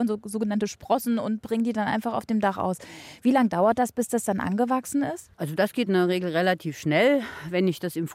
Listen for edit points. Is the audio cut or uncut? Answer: cut